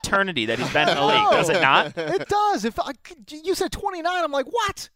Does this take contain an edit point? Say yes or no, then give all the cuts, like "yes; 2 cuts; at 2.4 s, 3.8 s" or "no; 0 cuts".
yes; 1 cut; at 2.3 s